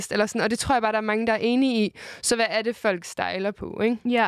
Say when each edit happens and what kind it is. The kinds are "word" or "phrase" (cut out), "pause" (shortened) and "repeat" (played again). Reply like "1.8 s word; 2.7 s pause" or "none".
none